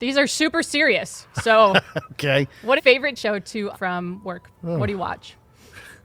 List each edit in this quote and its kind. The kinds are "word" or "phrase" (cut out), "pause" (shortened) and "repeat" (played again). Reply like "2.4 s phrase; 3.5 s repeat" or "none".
1.3 s pause; 2.8 s phrase; 3.2 s word; 3.7 s word; 4.5 s pause